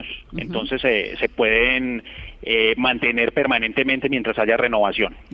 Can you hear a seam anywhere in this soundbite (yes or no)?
no